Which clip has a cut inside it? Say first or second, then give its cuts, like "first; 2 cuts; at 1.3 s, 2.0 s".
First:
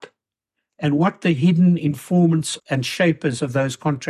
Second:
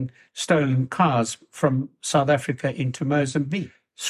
first; 1 cut; at 2.6 s